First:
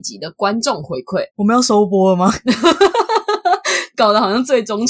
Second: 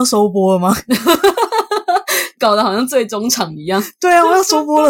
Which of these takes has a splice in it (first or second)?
first